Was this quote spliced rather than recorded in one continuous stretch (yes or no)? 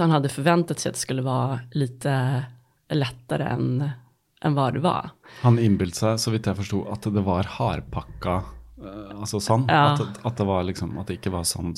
no